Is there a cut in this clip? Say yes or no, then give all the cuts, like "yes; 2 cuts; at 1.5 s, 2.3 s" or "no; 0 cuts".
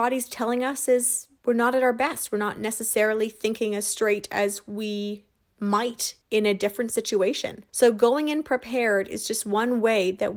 yes; 3 cuts; at 1.4 s, 6.2 s, 7.7 s